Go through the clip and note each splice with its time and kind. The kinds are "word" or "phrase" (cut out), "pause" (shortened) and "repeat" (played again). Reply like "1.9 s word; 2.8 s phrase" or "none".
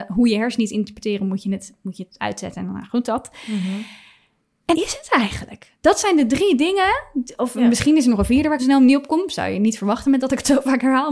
4.7 s word; 8.6 s phrase